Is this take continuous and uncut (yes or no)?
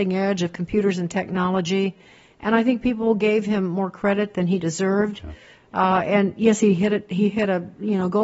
yes